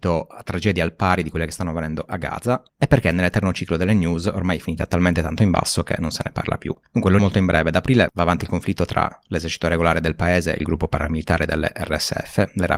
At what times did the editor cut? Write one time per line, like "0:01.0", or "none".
0:07.2